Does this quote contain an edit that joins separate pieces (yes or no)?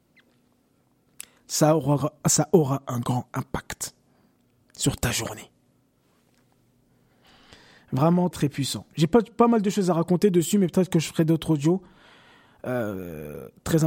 yes